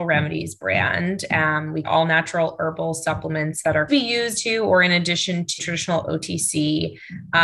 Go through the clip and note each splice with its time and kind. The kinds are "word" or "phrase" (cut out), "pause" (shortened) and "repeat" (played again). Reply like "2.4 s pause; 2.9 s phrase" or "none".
1.8 s word; 3.9 s phrase; 4.3 s phrase; 5.6 s word